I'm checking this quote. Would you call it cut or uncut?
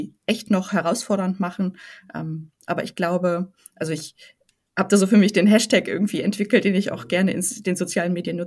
uncut